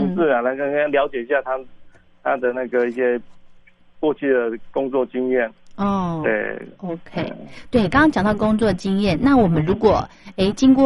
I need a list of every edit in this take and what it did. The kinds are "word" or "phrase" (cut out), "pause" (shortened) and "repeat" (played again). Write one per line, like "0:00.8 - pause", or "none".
none